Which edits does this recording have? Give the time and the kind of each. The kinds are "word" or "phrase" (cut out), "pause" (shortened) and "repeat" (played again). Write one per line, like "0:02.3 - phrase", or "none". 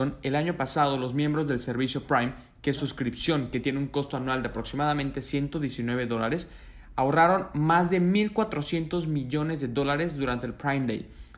0:02.8 - word